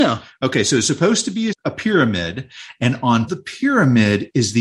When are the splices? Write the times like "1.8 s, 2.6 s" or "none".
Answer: 1.5 s, 3.3 s